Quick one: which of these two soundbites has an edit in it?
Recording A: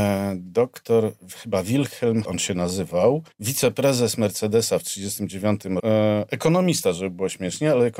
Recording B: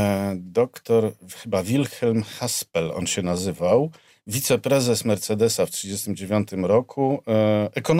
A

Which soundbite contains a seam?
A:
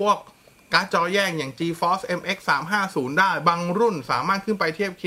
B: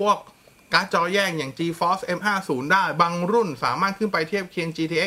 B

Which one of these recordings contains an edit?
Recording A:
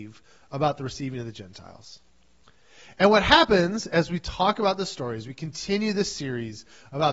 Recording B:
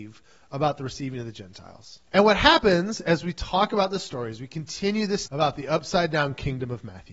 B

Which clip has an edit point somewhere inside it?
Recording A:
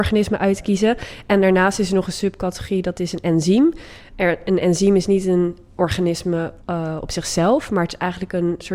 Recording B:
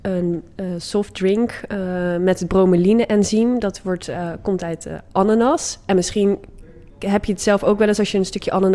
A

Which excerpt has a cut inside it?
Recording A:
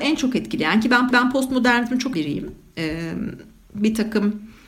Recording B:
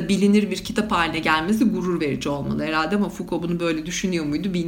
A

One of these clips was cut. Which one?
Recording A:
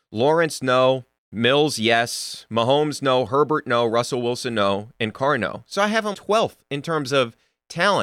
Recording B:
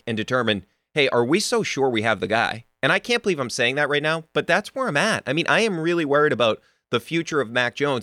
A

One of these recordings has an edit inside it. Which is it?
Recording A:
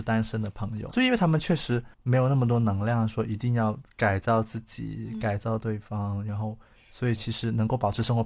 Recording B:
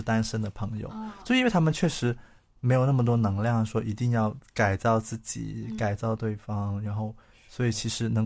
A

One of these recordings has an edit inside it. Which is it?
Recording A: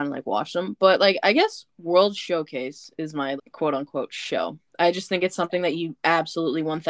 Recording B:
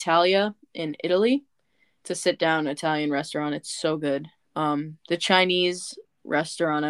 A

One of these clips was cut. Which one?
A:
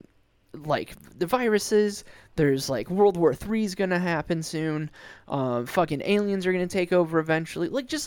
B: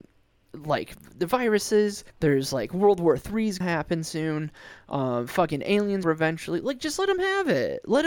B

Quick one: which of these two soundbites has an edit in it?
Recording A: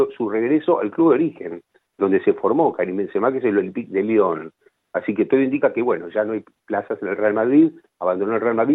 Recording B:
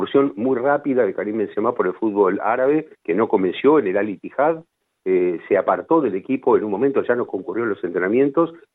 B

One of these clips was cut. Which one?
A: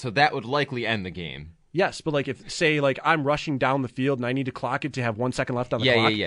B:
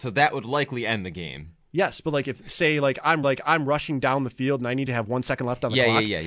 B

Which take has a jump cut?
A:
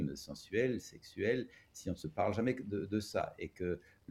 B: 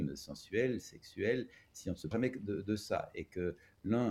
B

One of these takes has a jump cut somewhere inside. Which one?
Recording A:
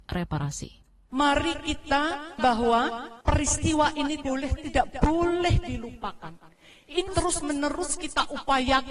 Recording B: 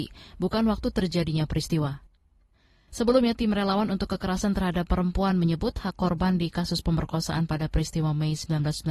A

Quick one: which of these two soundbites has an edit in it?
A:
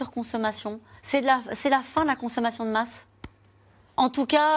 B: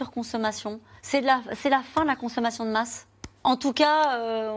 B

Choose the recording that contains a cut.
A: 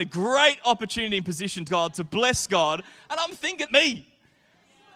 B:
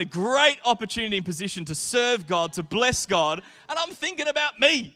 A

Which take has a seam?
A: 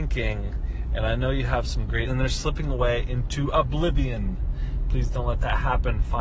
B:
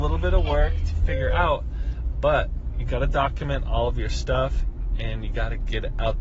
A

